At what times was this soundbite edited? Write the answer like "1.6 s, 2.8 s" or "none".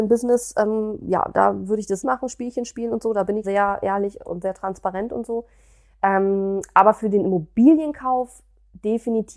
2.0 s, 3.4 s, 4.2 s